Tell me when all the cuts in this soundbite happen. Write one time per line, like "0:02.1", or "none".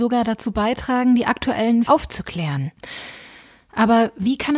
0:01.9